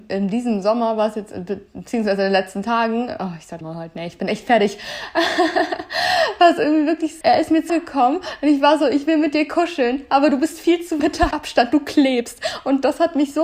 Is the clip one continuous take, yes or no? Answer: no